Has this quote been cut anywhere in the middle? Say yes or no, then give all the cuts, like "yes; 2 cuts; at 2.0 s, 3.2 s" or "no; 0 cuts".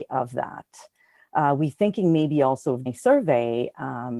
yes; 1 cut; at 2.9 s